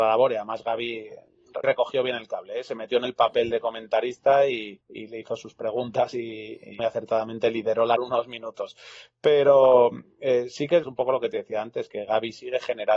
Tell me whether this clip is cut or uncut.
cut